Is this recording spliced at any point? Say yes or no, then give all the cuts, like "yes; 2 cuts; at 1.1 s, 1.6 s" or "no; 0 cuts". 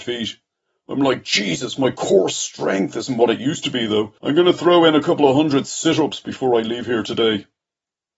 yes; 1 cut; at 4.2 s